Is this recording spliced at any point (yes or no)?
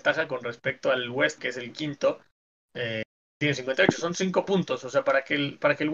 yes